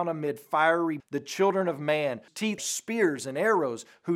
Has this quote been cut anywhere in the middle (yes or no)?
yes